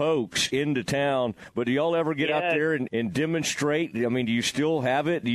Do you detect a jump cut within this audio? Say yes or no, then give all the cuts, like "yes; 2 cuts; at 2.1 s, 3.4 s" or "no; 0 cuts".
yes; 1 cut; at 2.9 s